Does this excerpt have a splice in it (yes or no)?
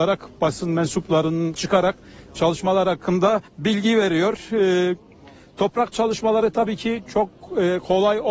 yes